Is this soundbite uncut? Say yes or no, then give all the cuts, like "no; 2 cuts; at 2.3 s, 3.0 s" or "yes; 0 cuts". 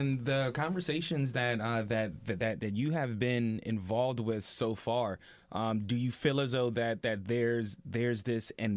yes; 0 cuts